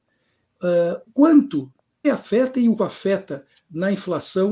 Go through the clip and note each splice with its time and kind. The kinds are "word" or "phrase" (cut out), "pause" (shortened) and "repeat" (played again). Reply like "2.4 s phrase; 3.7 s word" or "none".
1.1 s word; 2.0 s word; 2.8 s word